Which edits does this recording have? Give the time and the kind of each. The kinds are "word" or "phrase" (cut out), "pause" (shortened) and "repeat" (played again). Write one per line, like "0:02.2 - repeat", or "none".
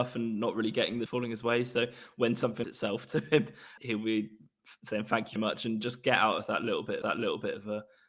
0:01.1 - word
0:02.6 - phrase
0:03.8 - word
0:05.4 - word
0:07.0 - repeat